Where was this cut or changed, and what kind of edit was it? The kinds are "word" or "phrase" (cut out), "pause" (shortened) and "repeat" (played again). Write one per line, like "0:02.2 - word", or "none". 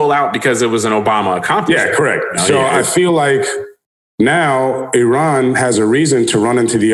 none

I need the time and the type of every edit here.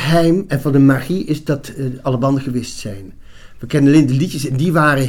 none

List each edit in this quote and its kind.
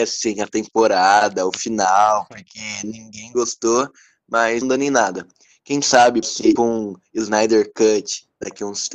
0:04.6 - phrase
0:06.2 - word
0:06.6 - word

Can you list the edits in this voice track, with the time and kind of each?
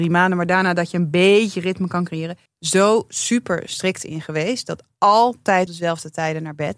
0:02.5 - pause
0:05.7 - word

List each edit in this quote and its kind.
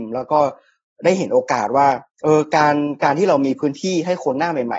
0:02.1 - pause

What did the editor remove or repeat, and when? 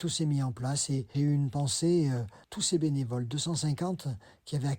0:01.1 - word
0:02.4 - word

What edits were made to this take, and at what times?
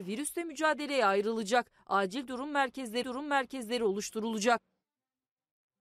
0:03.0 - repeat

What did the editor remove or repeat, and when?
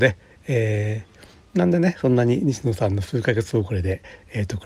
none

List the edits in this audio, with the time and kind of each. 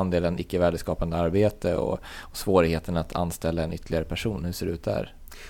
none

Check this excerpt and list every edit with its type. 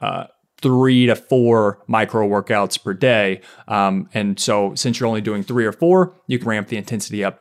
0:06.4 - word

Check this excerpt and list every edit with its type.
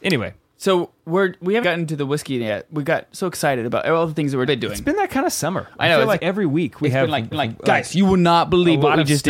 0:01.6 - word
0:04.5 - phrase
0:06.2 - word
0:07.3 - repeat

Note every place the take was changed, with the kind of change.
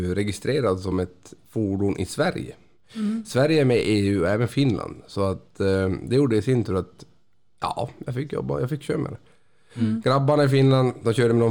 none

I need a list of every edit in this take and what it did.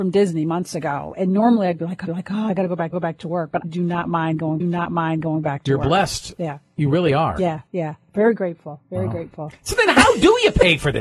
0:02.1 - repeat
0:02.9 - repeat
0:03.6 - word
0:04.6 - repeat
0:07.7 - pause

